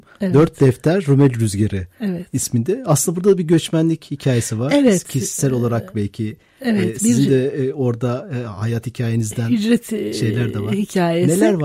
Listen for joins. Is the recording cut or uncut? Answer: uncut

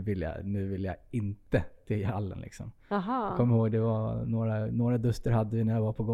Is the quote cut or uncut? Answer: uncut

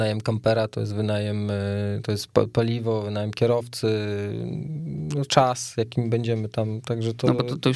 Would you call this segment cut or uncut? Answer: uncut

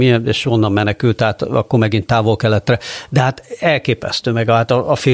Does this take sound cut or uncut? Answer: uncut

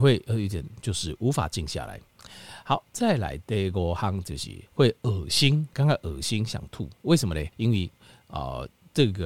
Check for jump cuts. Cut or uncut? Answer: cut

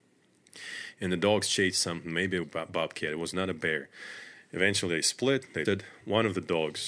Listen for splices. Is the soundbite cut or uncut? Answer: cut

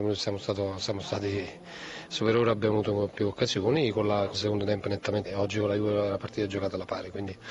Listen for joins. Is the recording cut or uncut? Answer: cut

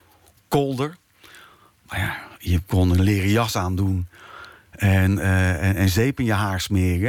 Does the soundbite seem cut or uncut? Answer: uncut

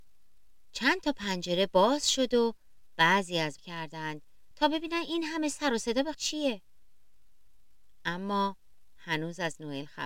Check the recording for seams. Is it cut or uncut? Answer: cut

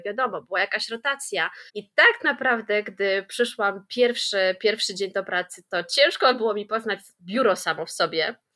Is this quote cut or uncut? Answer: cut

